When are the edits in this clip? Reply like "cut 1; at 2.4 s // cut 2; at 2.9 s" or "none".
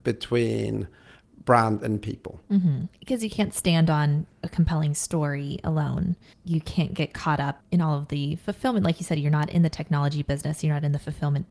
cut 1; at 6.3 s // cut 2; at 7.6 s